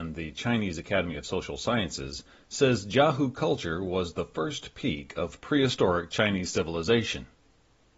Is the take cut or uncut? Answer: uncut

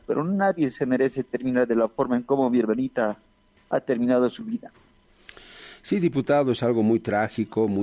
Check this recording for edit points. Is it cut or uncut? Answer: uncut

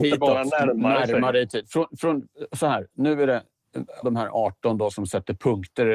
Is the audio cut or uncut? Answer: cut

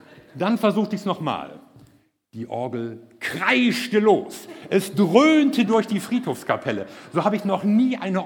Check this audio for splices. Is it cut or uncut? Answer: uncut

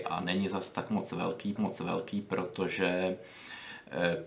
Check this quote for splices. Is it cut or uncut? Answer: cut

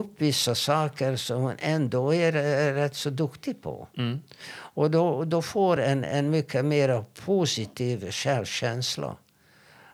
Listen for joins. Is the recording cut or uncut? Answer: uncut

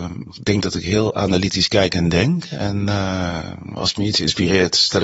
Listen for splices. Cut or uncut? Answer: uncut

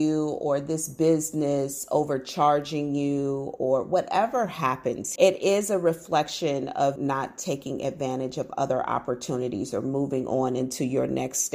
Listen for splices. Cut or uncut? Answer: cut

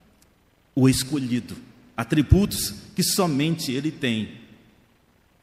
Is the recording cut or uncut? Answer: uncut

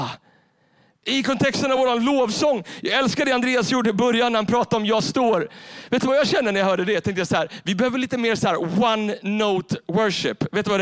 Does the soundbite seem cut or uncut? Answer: uncut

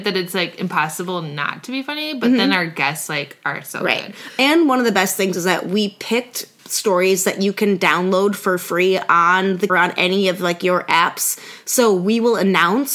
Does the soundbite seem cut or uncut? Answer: cut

